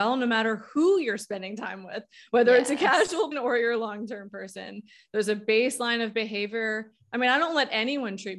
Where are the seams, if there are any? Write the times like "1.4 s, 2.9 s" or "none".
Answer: 3.3 s